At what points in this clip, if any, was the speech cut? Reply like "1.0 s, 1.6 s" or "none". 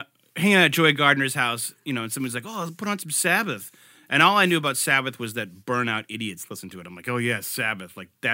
none